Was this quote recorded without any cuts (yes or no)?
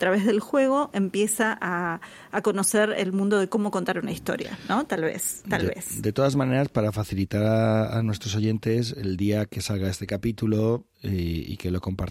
yes